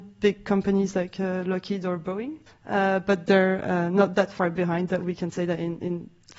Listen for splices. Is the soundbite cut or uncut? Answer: cut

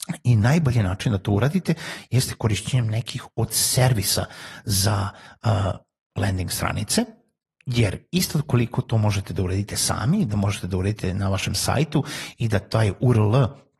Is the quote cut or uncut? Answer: uncut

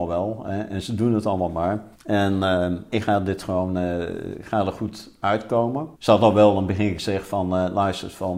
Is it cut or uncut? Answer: cut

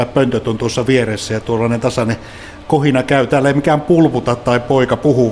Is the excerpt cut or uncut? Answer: uncut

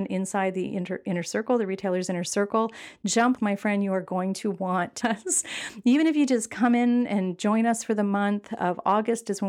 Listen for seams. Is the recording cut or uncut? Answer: cut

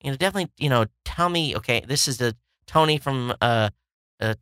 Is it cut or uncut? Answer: uncut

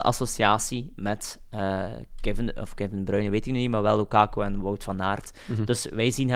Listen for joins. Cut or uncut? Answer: uncut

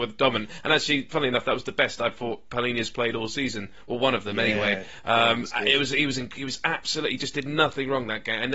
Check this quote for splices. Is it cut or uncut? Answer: uncut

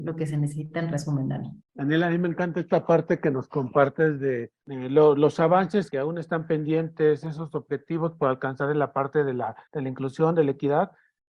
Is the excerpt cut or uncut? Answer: cut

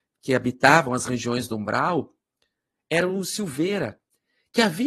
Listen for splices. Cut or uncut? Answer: uncut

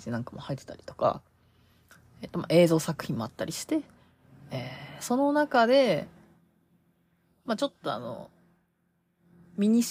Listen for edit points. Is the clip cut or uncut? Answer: uncut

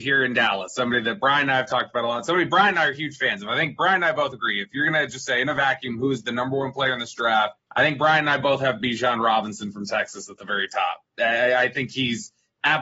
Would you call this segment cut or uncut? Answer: cut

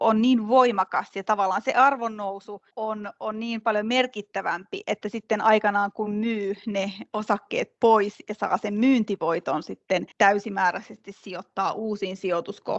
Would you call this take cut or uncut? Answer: cut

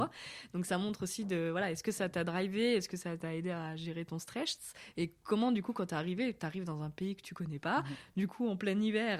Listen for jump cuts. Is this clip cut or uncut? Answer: uncut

